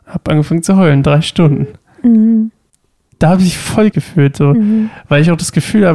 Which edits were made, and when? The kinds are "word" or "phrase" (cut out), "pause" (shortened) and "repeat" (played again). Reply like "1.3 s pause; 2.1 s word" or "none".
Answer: 2.7 s pause; 3.9 s phrase

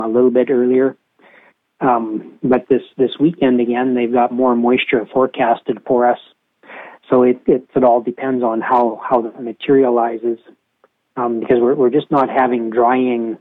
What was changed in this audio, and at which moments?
7.7 s phrase

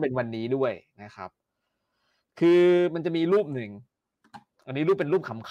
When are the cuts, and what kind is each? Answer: none

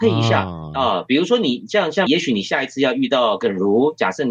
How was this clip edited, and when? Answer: 2.1 s word

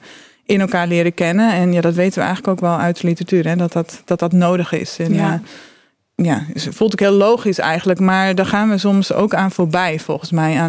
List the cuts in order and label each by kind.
none

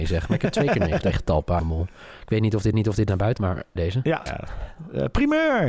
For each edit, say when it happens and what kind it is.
1.0 s word; 1.6 s phrase; 2.7 s repeat; 3.4 s word; 3.8 s word; 4.3 s word

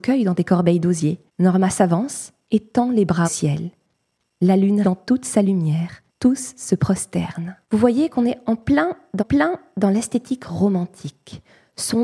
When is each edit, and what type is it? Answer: 1.3 s pause; 3.2 s word; 4.8 s word; 6.1 s pause; 7.6 s pause; 9.2 s repeat

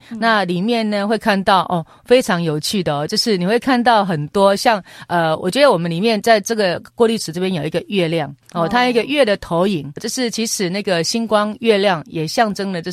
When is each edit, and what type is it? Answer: 8.4 s pause; 10.0 s word

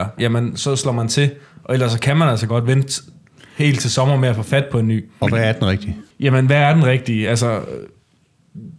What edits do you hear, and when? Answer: 6.1 s pause

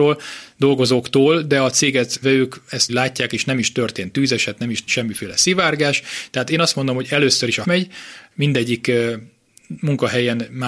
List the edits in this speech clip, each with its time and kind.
2.2 s word; 2.9 s word; 4.9 s word; 7.6 s word

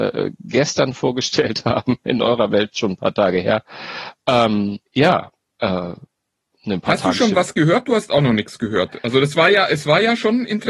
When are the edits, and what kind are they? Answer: 4.9 s pause

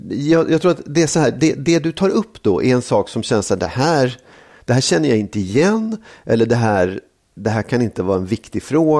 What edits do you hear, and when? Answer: none

